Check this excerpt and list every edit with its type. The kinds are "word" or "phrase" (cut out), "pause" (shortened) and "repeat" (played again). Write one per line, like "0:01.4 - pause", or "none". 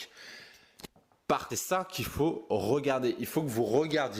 0:01.5 - phrase